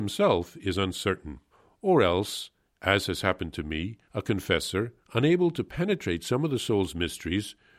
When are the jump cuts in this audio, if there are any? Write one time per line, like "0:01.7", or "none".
0:01.5
0:02.7
0:04.1

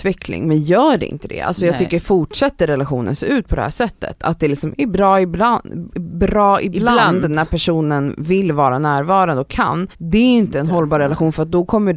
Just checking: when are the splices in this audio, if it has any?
0:09.9

